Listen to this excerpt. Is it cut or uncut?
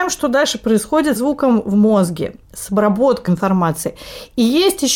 cut